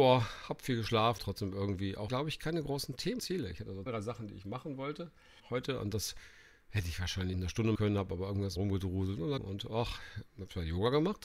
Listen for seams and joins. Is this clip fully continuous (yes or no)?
no